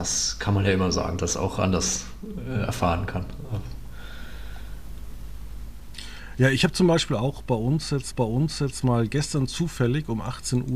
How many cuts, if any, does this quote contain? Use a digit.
2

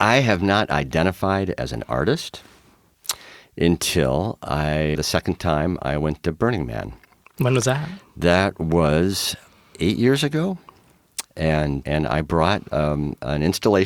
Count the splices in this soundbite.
2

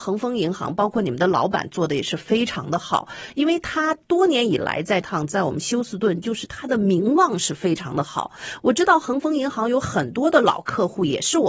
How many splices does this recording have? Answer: 1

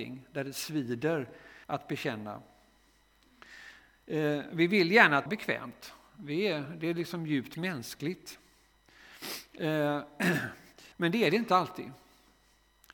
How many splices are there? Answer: 3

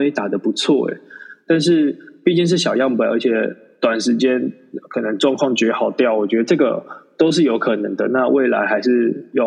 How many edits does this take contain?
0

